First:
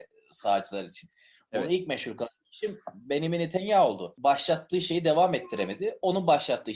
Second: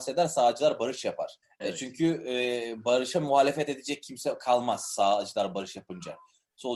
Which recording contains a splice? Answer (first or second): second